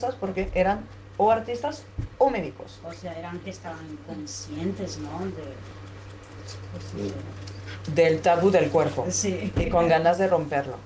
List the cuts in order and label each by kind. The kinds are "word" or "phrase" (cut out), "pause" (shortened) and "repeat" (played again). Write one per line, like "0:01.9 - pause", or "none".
0:03.4 - word